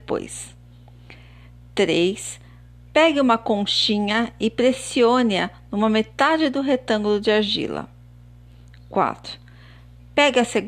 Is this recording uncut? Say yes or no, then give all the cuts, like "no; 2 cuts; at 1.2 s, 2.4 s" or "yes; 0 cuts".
yes; 0 cuts